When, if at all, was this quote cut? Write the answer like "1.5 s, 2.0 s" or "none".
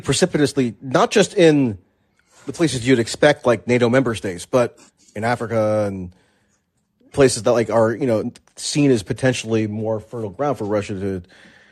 7.1 s

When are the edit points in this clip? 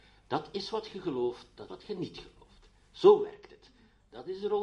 1.7 s

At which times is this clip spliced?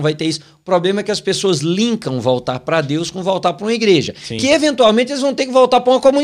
none

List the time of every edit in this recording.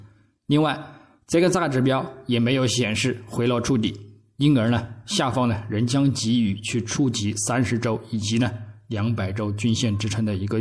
none

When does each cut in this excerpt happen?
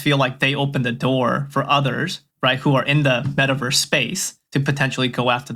2.3 s

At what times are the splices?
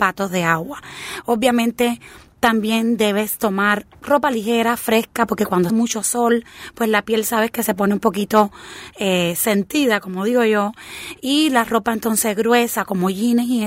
3.9 s, 5.7 s

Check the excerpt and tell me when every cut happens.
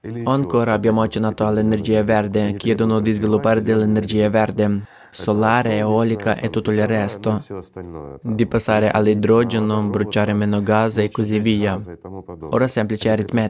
none

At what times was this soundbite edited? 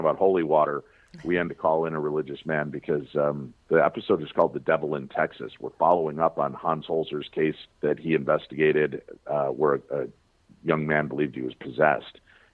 1.5 s, 3.6 s, 7.7 s

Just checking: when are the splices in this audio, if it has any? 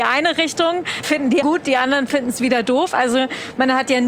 1.0 s, 1.4 s

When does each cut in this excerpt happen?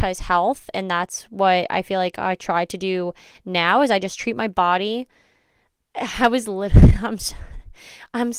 none

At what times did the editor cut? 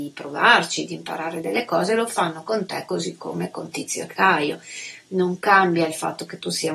none

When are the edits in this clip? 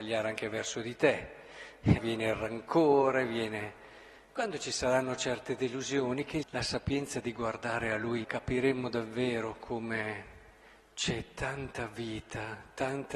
2.0 s, 6.4 s, 8.2 s

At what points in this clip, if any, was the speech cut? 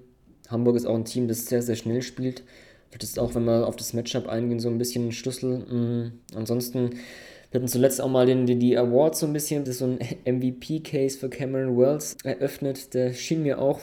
6.2 s, 9.6 s, 12.1 s

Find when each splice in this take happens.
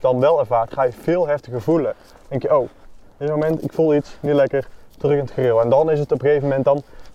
none

